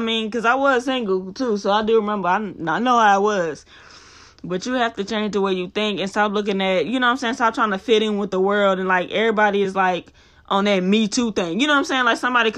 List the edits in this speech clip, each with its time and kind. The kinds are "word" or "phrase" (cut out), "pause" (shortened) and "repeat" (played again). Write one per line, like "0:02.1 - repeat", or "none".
none